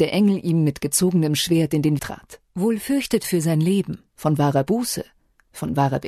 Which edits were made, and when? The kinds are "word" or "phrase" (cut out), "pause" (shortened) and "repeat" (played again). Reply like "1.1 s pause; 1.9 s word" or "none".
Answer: 2.0 s word; 2.5 s pause; 3.2 s word; 4.1 s pause